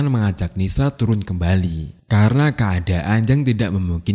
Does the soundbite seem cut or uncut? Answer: cut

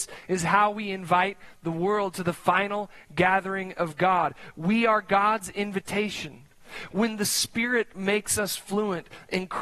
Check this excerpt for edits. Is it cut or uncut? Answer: uncut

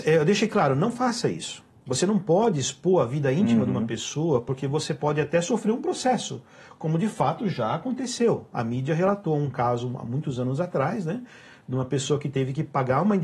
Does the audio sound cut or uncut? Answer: uncut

